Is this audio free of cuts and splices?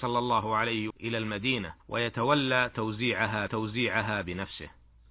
no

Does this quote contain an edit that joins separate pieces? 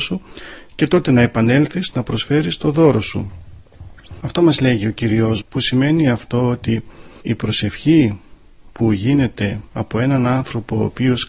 yes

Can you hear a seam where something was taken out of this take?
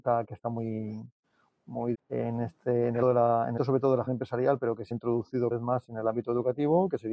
yes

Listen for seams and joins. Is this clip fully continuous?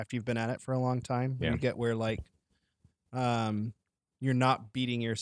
yes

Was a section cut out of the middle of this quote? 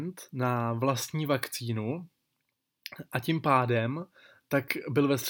no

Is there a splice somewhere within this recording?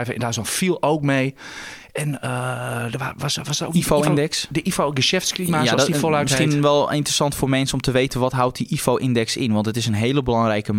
no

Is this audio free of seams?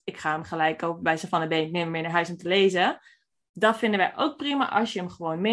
yes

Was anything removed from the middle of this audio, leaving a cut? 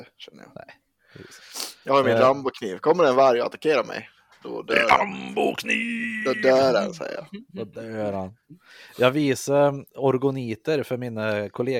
yes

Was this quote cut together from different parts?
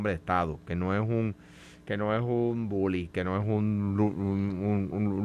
no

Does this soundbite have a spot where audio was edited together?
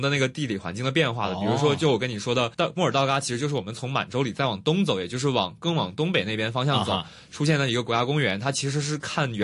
yes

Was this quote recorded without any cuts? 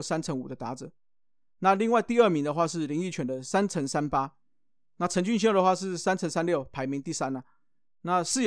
yes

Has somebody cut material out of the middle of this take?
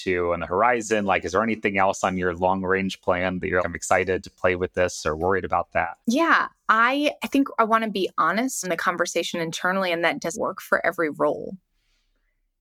yes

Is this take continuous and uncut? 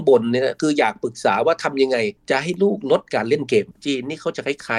no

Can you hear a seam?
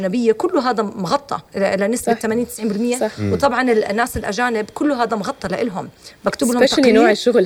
no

